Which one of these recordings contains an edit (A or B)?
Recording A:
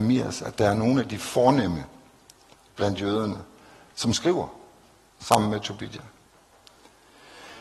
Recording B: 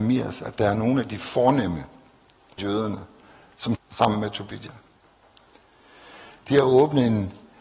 B